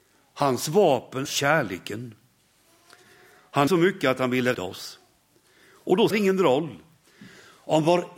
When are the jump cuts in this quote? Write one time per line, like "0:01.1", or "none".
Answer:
0:01.2
0:03.7
0:04.5
0:06.1

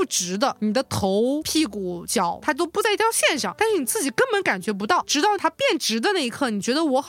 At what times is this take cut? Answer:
0:01.4

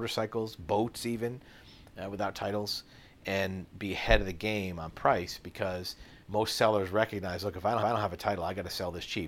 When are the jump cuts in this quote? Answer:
0:06.2
0:07.8

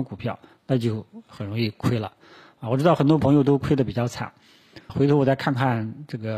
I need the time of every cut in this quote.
0:04.9

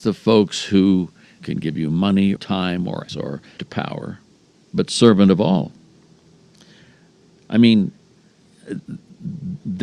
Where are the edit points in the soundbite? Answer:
0:01.4
0:02.4
0:03.1
0:03.6

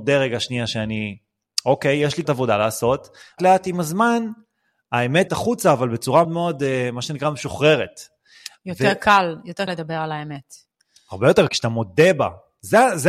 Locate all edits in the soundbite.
0:02.2
0:03.4
0:05.3
0:06.2
0:09.7
0:11.5

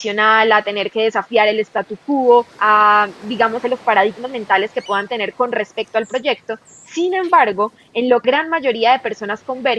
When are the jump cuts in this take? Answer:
0:02.5
0:03.6
0:08.2

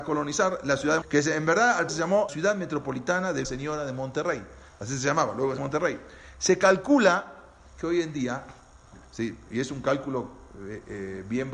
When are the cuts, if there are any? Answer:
0:01.0
0:01.9
0:02.3
0:03.4
0:05.6

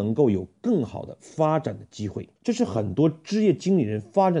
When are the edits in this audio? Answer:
0:02.4

